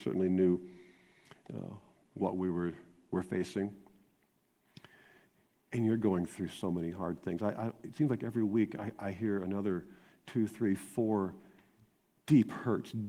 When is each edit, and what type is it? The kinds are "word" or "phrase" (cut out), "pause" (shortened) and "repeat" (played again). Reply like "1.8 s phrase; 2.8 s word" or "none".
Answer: none